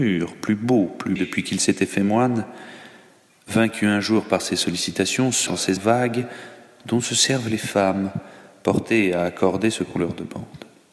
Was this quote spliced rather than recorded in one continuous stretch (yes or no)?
yes